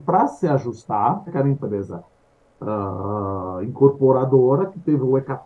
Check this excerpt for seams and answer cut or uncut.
cut